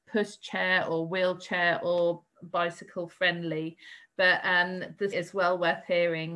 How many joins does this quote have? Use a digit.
1